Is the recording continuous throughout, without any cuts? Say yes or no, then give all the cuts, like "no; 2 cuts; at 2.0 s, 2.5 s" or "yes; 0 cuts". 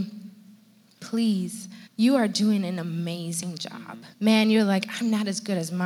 no; 2 cuts; at 1.9 s, 4.1 s